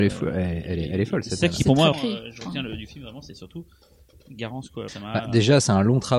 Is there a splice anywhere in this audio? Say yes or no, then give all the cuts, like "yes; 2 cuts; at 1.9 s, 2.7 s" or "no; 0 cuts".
yes; 2 cuts; at 1.9 s, 4.9 s